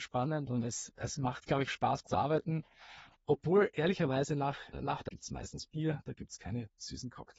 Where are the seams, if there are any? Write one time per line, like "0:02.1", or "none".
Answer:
0:01.7
0:02.1
0:04.7
0:05.1